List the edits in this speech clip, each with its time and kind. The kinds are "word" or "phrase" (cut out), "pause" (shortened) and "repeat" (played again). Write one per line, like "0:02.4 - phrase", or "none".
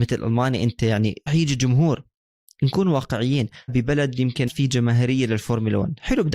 0:01.3 - word
0:03.7 - word
0:04.5 - word